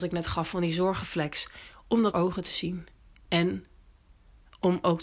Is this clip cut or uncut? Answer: cut